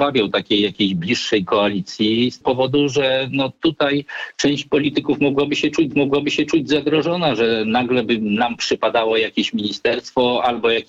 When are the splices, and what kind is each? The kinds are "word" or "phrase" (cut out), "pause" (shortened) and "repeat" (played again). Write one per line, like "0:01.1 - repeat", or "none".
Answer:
0:02.4 - word
0:05.9 - repeat